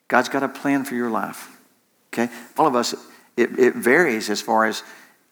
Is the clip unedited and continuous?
no; 2 cuts; at 2.6 s, 3.5 s

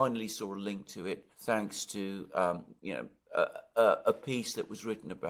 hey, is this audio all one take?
no; 2 cuts; at 1.3 s, 2.8 s

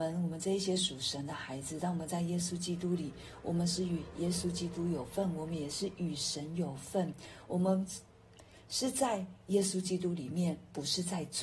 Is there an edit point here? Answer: no; 0 cuts

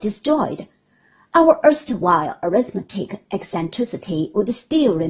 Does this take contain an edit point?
no; 0 cuts

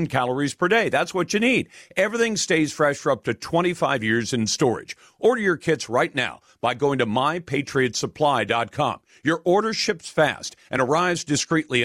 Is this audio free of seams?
yes; 0 cuts

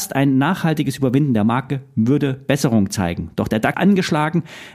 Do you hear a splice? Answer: yes; 1 cut; at 3.7 s

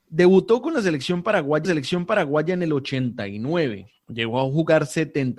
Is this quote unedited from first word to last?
no; 1 cut; at 1.6 s

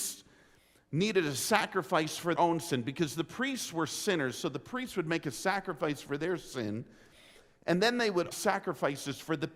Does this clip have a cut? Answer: yes; 2 cuts; at 2.3 s, 8.3 s

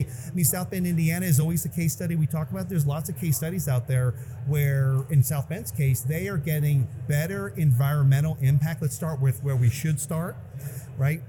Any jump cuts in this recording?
no; 0 cuts

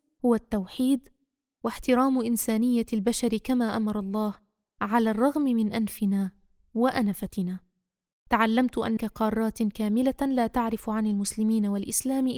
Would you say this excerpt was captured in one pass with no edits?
no; 1 cut; at 9.0 s

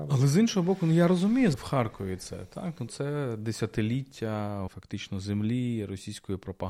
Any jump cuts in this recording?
yes; 3 cuts; at 1.5 s, 2.9 s, 4.7 s

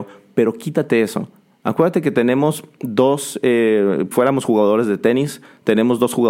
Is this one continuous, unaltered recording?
no; 1 cut; at 4.1 s

